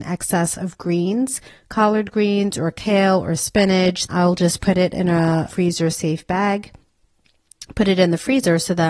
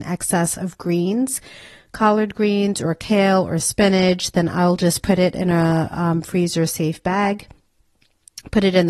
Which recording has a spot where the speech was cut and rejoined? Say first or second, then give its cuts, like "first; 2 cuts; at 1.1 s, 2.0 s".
first; 3 cuts; at 1.5 s, 4.1 s, 5.5 s